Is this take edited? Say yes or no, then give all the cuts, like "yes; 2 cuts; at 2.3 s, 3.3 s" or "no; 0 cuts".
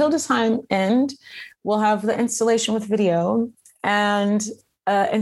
no; 0 cuts